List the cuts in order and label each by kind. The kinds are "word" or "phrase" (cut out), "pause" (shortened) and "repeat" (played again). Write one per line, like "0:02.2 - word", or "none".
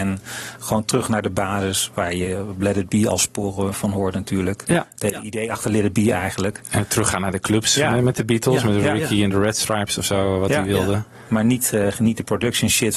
none